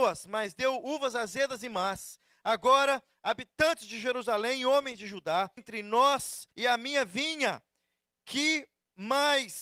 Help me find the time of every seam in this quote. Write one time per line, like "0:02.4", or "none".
0:05.6
0:06.5